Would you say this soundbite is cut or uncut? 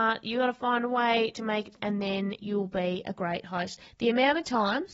cut